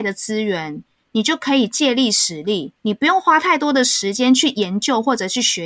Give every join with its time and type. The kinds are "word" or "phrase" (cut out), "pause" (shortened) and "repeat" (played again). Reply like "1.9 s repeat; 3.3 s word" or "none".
2.8 s pause